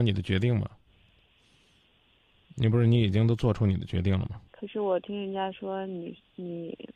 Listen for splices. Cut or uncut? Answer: cut